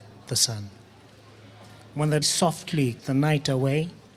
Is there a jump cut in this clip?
yes; 2 cuts; at 2.2 s, 3.0 s

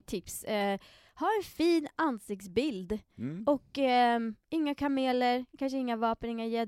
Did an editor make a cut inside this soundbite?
no; 0 cuts

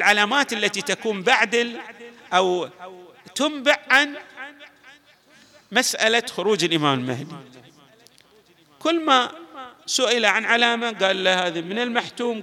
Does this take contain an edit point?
no; 0 cuts

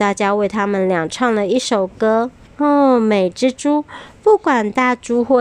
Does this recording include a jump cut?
yes; 1 cut; at 2.5 s

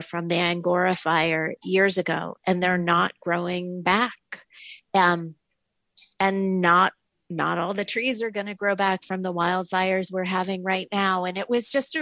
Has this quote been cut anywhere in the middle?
no; 0 cuts

